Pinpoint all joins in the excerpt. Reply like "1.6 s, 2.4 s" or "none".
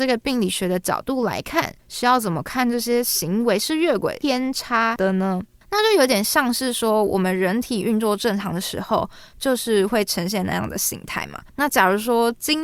1.8 s, 11.5 s